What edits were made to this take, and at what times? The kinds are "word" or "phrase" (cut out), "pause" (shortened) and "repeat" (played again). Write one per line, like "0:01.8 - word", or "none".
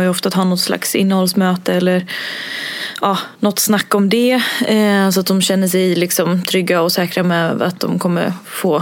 0:03.3 - pause